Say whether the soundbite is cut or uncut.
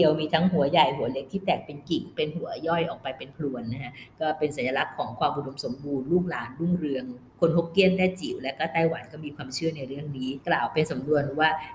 cut